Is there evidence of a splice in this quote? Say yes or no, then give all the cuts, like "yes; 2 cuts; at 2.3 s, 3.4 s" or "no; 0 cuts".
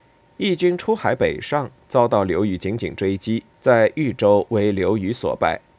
yes; 1 cut; at 3.5 s